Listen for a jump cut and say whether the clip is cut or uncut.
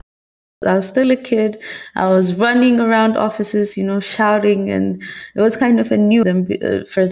cut